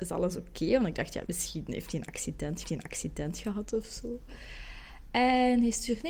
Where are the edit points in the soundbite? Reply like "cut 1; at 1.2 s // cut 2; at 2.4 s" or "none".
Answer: cut 1; at 1.3 s // cut 2; at 2.6 s